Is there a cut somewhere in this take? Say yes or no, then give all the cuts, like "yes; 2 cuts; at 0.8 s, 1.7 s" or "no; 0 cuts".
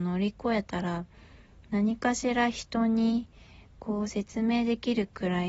no; 0 cuts